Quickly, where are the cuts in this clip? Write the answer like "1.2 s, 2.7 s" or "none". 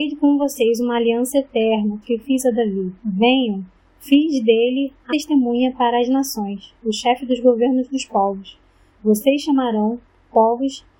2.0 s, 3.0 s, 5.1 s